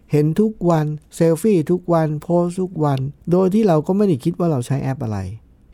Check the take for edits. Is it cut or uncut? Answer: cut